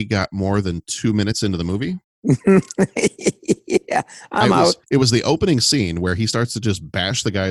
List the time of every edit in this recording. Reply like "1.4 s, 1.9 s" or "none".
2.0 s, 4.8 s